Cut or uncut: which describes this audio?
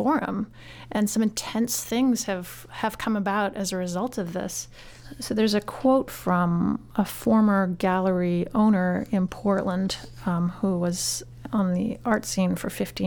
uncut